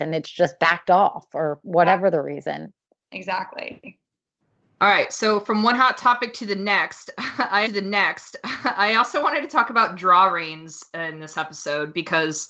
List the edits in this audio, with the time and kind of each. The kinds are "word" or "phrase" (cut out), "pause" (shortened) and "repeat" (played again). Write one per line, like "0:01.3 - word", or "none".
0:07.7 - repeat